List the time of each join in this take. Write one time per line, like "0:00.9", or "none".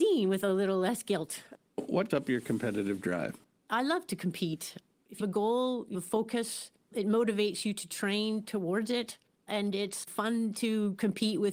0:02.1
0:05.2
0:05.9